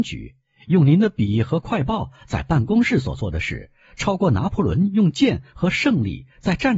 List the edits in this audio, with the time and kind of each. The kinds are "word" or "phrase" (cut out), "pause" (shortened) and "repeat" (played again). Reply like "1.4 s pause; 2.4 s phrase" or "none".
none